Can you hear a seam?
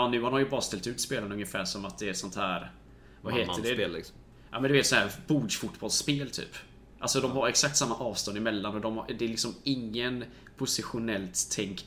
no; 0 cuts

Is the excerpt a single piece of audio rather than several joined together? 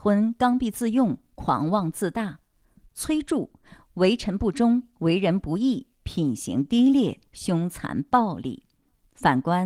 yes; 0 cuts

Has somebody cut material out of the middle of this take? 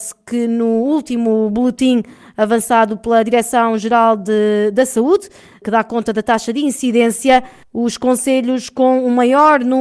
yes; 1 cut; at 7.6 s

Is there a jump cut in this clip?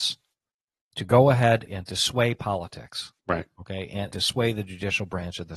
yes; 3 cuts; at 1.7 s, 3.2 s, 4.1 s

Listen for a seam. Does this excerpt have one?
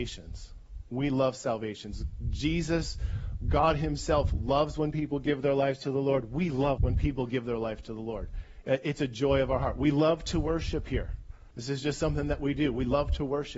yes; 2 cuts; at 6.8 s, 11.5 s

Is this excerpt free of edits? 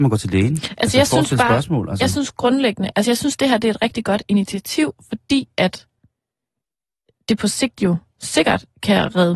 yes; 0 cuts

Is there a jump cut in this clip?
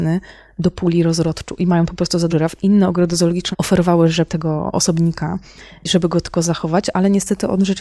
yes; 3 cuts; at 2.3 s, 3.5 s, 4.3 s

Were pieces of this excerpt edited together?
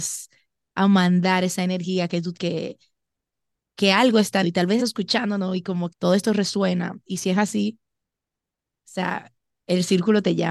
yes; 4 cuts; at 2.3 s, 4.4 s, 4.8 s, 5.9 s

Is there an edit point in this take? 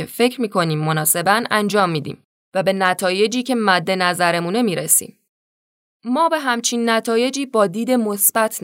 no; 0 cuts

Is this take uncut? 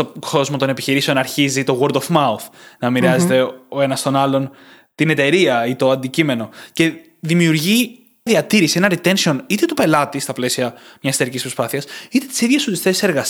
no; 1 cut; at 8.3 s

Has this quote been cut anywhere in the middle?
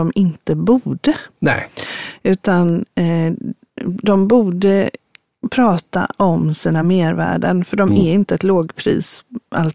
no; 0 cuts

